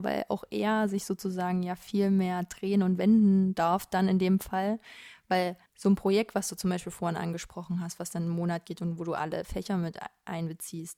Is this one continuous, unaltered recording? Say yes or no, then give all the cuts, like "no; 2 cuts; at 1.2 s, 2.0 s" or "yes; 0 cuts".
no; 1 cut; at 5.7 s